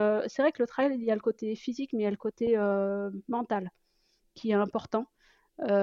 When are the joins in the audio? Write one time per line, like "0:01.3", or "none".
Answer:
none